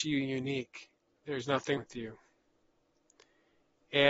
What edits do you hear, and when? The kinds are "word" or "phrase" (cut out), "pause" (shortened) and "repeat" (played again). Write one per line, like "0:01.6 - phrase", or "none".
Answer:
0:01.8 - word